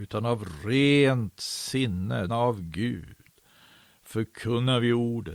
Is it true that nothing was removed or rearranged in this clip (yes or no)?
no